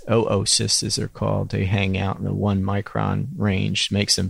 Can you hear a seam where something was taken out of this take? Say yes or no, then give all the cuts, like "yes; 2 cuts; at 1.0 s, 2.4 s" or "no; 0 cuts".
no; 0 cuts